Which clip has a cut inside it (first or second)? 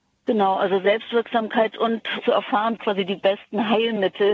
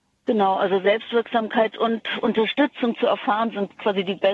first